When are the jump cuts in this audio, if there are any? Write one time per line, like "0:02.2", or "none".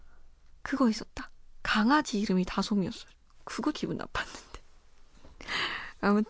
0:03.7